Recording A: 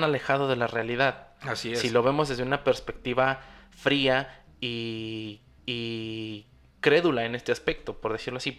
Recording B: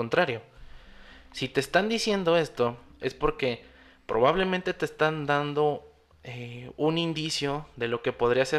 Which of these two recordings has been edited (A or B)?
A